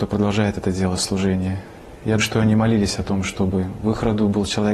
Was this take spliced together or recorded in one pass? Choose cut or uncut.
cut